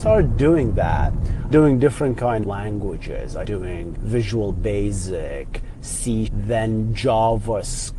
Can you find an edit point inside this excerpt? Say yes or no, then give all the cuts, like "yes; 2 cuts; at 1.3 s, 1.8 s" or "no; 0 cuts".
yes; 5 cuts; at 1.5 s, 2.4 s, 3.4 s, 3.9 s, 6.3 s